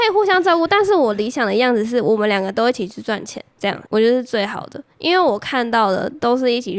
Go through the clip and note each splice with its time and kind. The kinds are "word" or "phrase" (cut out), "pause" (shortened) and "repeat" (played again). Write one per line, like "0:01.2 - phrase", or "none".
0:03.5 - pause
0:03.9 - pause